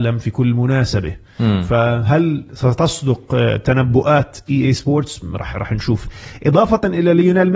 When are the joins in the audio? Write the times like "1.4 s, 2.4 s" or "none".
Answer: none

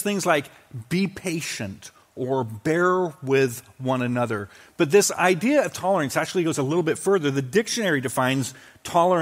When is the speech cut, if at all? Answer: none

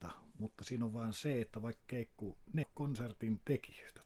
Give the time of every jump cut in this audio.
1.8 s, 2.6 s

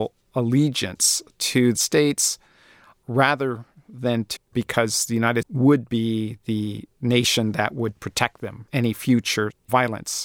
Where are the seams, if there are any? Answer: 1.8 s, 4.4 s, 5.4 s, 8.7 s

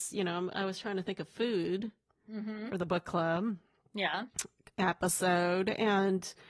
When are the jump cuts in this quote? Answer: none

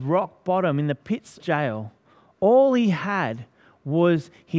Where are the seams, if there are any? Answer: 1.4 s

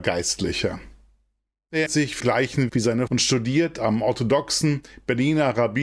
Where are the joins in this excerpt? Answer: 1.9 s, 2.2 s, 2.7 s, 3.1 s

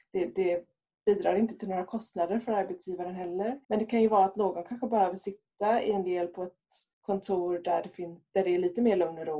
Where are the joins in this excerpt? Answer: 3.6 s, 6.9 s

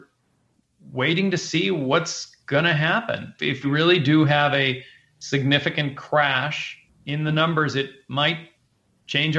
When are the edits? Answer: 3.6 s

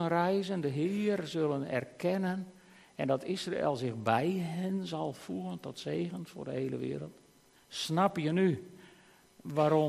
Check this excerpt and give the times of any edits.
7.6 s

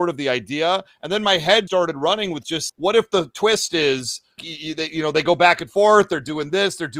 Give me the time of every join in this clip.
1.7 s, 2.7 s, 4.4 s

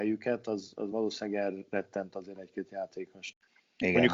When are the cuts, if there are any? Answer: none

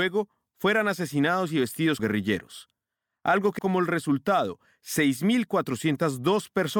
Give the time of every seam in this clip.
2.0 s, 3.6 s

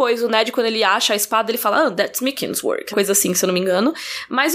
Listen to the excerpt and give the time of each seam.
2.9 s

